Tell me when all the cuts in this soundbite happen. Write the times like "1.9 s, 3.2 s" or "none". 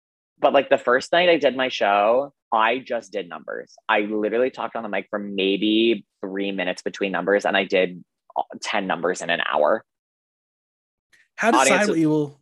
2.4 s, 6.1 s, 11.5 s